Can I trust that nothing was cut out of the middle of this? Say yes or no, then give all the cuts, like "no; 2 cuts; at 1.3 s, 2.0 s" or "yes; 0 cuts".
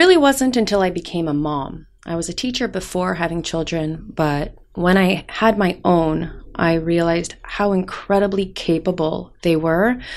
yes; 0 cuts